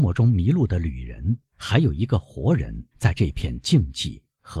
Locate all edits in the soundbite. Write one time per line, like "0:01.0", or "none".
0:01.5
0:02.9